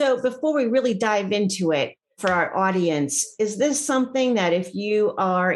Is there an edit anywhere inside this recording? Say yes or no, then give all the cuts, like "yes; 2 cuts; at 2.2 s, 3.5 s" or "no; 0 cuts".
no; 0 cuts